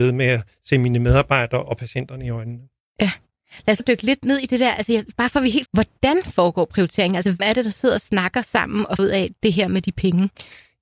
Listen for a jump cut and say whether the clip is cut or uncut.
cut